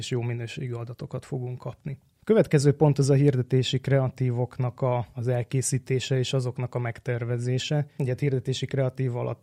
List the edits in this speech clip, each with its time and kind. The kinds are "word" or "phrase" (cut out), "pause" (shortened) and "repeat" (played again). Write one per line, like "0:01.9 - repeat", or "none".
none